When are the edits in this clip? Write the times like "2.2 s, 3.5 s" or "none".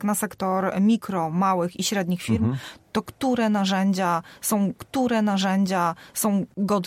4.8 s